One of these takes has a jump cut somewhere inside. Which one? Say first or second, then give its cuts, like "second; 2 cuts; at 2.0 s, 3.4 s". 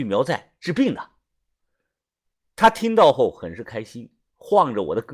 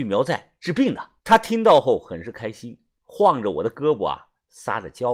second; 1 cut; at 1.2 s